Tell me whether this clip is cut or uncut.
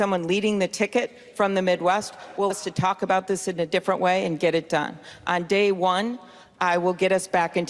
cut